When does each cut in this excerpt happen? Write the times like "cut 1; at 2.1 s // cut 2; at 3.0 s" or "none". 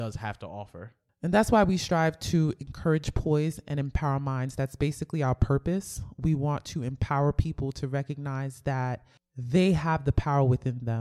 none

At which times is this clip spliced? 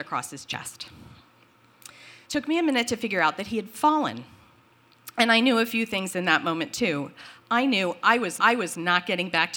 cut 1; at 2.2 s // cut 2; at 8.4 s

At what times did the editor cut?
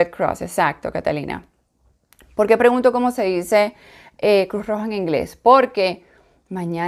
none

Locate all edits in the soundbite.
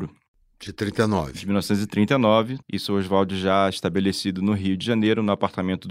cut 1; at 2.6 s

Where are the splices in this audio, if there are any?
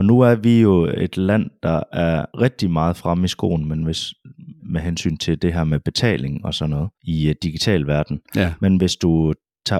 cut 1; at 2.3 s // cut 2; at 4.6 s // cut 3; at 6.9 s

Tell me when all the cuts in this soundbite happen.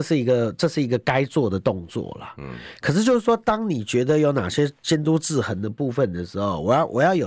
none

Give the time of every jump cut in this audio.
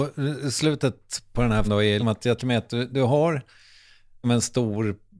cut 1; at 1.3 s // cut 2; at 1.6 s // cut 3; at 2.0 s // cut 4; at 2.4 s // cut 5; at 4.2 s

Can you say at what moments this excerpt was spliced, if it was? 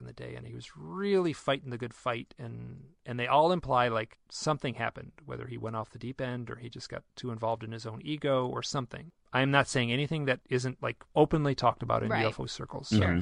cut 1; at 3.0 s

